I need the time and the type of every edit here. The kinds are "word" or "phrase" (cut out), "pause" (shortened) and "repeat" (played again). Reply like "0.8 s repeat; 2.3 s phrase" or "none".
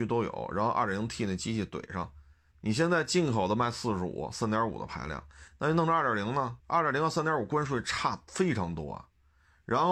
2.5 s pause; 6.6 s pause

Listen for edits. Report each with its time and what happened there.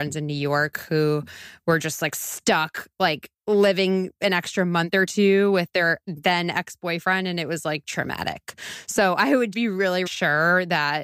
3.3 s pause; 9.5 s word; 10.1 s word

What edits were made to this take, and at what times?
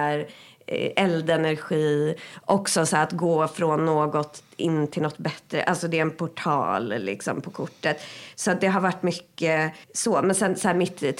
9.8 s pause

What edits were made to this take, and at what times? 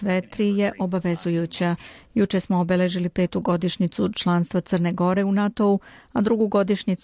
none

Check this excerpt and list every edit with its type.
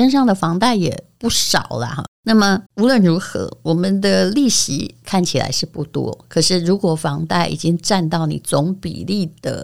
2.1 s pause; 2.7 s pause

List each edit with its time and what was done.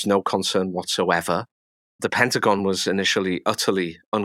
none

